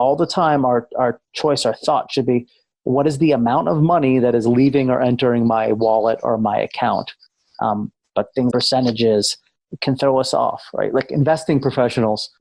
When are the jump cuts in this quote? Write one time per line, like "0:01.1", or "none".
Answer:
0:08.5